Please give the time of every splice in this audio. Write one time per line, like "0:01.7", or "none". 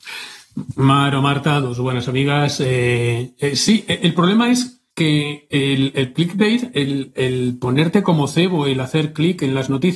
0:04.9